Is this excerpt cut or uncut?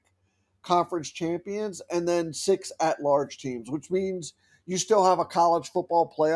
uncut